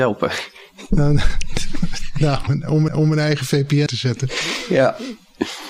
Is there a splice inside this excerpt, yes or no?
yes